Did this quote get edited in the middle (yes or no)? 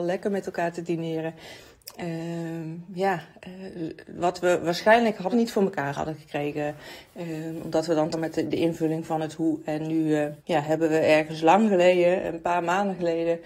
yes